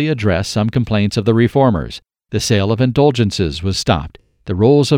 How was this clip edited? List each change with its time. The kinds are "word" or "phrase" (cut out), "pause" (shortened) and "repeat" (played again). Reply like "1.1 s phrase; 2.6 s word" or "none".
none